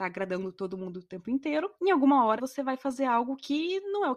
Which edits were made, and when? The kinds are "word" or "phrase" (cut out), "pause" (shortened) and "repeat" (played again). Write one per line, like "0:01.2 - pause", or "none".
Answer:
0:01.8 - pause
0:02.4 - word